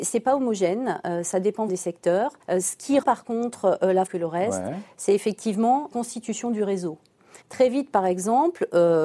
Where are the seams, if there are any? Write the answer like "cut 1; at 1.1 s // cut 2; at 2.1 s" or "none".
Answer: cut 1; at 1.7 s // cut 2; at 2.4 s // cut 3; at 3.0 s // cut 4; at 4.1 s // cut 5; at 5.9 s // cut 6; at 7.4 s